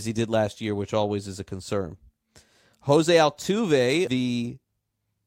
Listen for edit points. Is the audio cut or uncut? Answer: cut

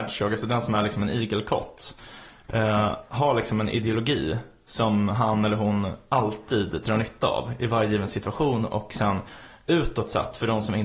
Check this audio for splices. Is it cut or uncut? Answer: uncut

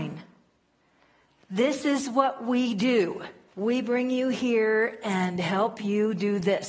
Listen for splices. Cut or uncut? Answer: cut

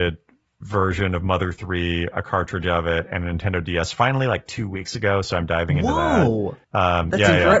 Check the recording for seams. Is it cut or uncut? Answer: cut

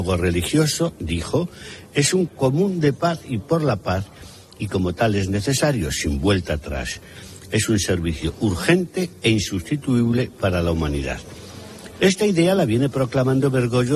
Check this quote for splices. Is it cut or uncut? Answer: cut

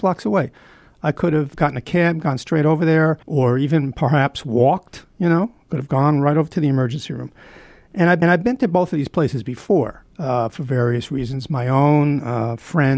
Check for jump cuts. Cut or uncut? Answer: cut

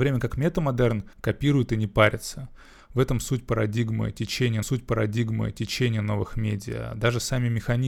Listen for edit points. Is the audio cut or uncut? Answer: cut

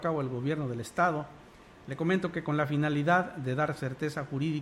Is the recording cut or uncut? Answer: uncut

